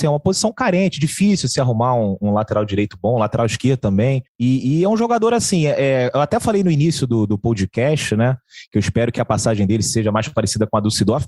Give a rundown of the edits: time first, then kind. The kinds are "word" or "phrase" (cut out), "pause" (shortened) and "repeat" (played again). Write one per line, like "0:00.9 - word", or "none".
0:04.3 - pause